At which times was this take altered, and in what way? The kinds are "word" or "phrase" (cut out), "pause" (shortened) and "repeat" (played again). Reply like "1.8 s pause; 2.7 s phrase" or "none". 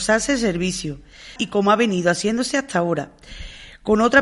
1.4 s word